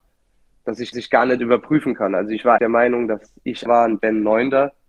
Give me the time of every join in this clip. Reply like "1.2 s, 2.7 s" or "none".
0.9 s, 2.6 s, 3.7 s